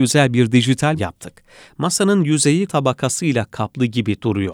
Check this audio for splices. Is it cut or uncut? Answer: cut